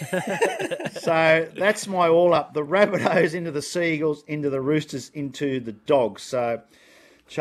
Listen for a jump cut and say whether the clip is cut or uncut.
uncut